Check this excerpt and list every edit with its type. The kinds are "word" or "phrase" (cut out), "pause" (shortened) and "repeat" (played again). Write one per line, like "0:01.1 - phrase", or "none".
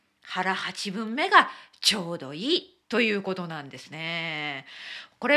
0:02.8 - pause